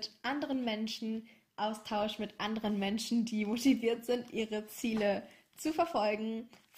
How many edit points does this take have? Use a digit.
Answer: 0